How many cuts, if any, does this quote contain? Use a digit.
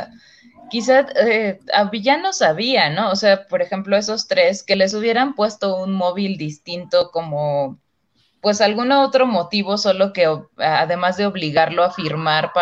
0